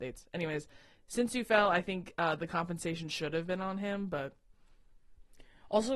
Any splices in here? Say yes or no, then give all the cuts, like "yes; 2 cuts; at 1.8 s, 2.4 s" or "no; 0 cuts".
no; 0 cuts